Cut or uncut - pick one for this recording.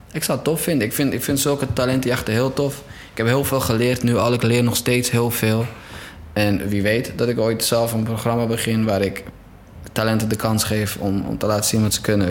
uncut